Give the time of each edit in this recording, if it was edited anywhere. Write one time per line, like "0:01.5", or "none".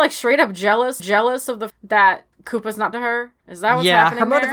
0:01.0
0:01.7
0:02.3
0:02.9
0:03.4